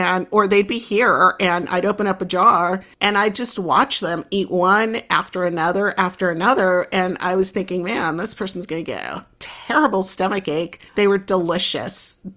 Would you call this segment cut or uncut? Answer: cut